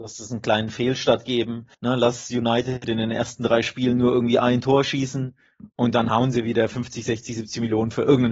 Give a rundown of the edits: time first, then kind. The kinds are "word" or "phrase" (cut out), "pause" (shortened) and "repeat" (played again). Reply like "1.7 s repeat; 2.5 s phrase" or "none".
1.7 s pause; 5.7 s pause